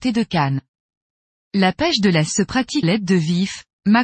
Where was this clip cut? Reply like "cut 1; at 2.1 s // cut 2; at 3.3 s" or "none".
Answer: cut 1; at 2.3 s // cut 2; at 2.8 s